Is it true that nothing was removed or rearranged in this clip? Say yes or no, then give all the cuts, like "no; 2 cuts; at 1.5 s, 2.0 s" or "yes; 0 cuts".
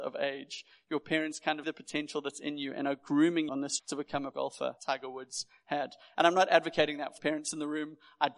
no; 6 cuts; at 1.6 s, 3.5 s, 3.8 s, 4.3 s, 4.8 s, 7.2 s